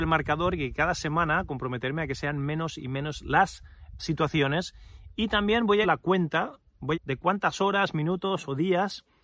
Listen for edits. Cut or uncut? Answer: cut